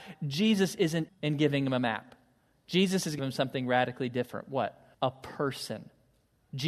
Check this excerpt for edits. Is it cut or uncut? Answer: cut